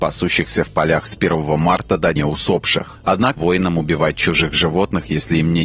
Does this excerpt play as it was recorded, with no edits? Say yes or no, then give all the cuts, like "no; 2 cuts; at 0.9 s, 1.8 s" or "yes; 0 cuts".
no; 2 cuts; at 2.2 s, 3.4 s